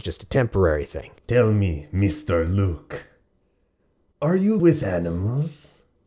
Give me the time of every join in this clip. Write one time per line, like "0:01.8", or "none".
0:01.2
0:04.6